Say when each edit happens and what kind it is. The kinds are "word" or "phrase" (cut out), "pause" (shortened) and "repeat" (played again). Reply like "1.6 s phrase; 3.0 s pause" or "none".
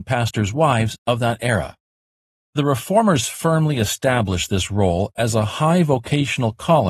none

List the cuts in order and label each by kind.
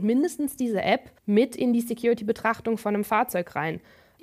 1.2 s pause

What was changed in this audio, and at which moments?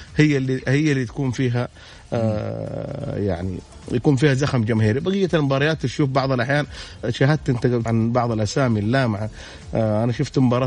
7.0 s word; 7.9 s phrase

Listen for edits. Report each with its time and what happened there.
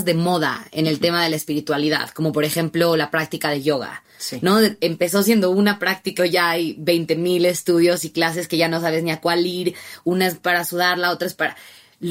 6.2 s phrase

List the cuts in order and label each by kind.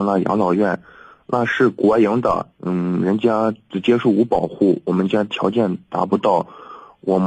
2.5 s pause

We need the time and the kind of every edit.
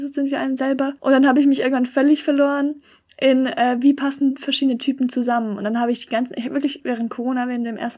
1.0 s pause

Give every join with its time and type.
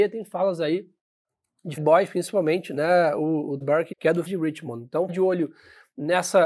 1.8 s word; 3.6 s word; 3.9 s word; 4.3 s word; 5.1 s word

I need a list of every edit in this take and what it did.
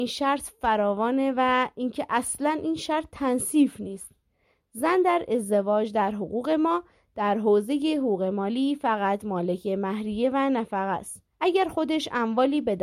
11.3 s pause

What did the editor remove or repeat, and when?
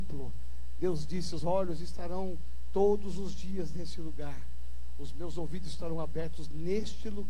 1.4 s word

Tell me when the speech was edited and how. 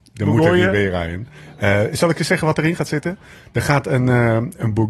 none

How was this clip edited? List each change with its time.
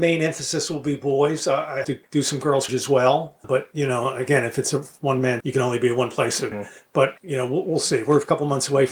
1.8 s word; 2.7 s word; 3.4 s word; 5.4 s word; 6.5 s word; 7.2 s word

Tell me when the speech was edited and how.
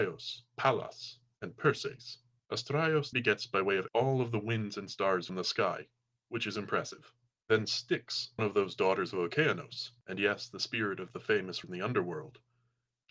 3.1 s word; 3.9 s word; 5.3 s word; 8.4 s word; 11.6 s word

